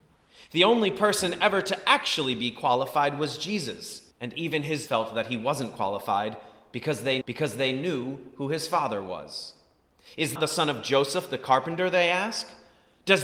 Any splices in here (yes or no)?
yes